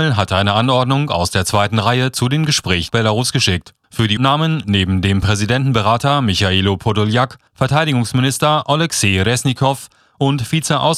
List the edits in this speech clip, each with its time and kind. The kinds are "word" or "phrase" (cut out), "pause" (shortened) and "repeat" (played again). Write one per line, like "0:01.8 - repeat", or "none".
0:02.9 - word
0:03.8 - pause
0:04.2 - word
0:07.5 - pause